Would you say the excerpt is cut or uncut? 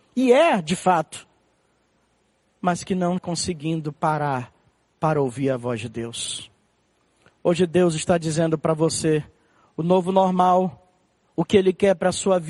cut